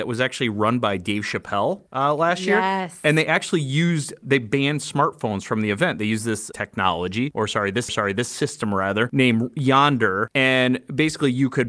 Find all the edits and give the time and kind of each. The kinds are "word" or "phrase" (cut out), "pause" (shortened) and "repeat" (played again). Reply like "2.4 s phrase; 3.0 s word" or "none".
1.9 s pause; 4.2 s word; 7.9 s repeat